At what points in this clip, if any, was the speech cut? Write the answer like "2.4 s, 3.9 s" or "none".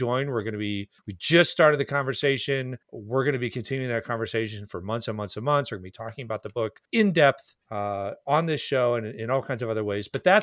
1.0 s, 2.8 s, 6.8 s, 7.6 s